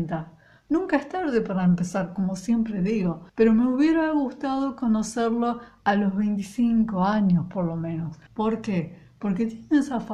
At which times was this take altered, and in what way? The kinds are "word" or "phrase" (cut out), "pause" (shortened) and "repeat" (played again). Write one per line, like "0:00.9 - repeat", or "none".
0:03.3 - pause
0:08.3 - pause

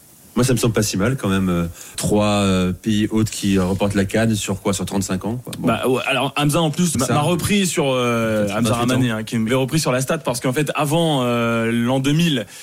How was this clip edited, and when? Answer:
0:01.9 - word
0:06.9 - word
0:09.5 - phrase

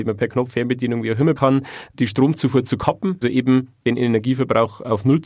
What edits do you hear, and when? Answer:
0:01.4 - word
0:03.2 - word

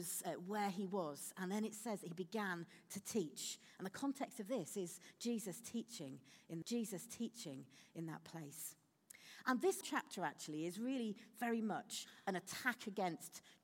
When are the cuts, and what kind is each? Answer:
0:06.6 - repeat
0:09.8 - word

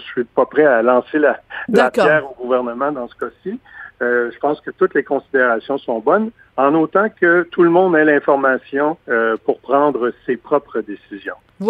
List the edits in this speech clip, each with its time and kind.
0:09.0 - pause

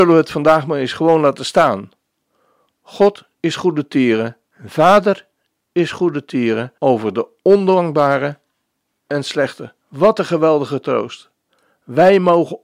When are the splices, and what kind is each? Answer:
0:03.4 - pause
0:04.5 - pause
0:06.8 - pause
0:09.8 - pause

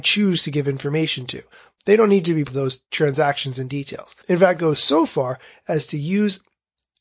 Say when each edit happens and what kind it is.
0:02.5 - word
0:02.8 - pause
0:04.2 - pause
0:04.6 - word

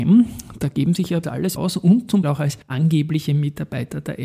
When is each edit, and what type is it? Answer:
0:01.2 - phrase
0:01.6 - word
0:02.2 - word
0:02.6 - pause

